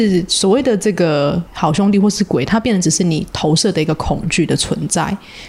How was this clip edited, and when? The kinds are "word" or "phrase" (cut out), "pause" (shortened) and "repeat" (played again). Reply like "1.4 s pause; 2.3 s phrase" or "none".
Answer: 1.5 s pause